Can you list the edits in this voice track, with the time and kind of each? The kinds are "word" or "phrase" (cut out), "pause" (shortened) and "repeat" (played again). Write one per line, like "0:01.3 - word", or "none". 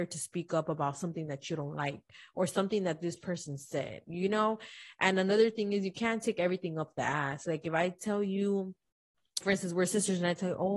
0:09.4 - word